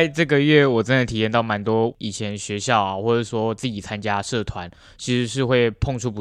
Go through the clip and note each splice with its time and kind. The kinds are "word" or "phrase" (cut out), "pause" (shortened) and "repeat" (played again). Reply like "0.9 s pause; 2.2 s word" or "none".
none